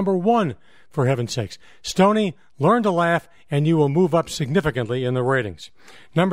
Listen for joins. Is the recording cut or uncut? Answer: uncut